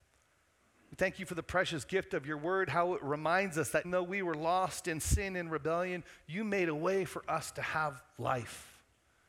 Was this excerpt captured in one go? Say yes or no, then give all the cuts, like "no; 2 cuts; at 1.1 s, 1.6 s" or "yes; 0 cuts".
no; 1 cut; at 3.8 s